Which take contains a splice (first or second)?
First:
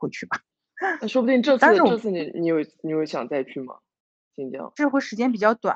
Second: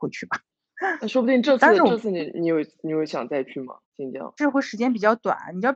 second